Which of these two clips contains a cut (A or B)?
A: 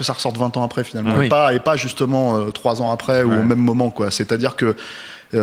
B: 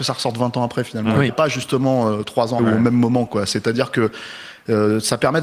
B